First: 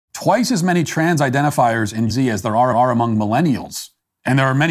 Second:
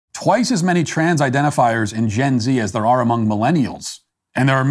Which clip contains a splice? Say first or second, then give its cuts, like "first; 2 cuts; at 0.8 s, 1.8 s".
first; 2 cuts; at 2.1 s, 2.7 s